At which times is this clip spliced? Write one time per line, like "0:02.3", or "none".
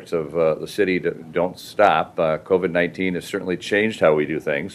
none